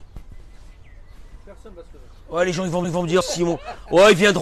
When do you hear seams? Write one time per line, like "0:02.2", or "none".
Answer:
0:02.8
0:03.2